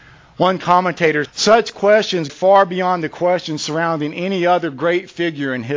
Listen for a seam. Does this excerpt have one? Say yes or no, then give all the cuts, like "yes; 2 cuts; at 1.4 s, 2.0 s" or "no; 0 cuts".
yes; 2 cuts; at 1.3 s, 2.3 s